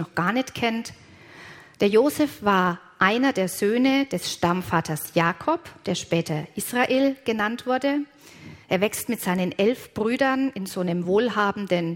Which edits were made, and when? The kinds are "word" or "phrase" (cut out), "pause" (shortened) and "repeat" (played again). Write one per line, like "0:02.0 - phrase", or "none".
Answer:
none